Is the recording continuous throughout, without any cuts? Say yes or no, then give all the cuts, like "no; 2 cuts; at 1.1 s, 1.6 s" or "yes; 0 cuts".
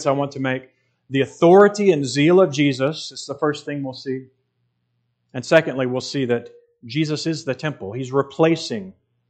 yes; 0 cuts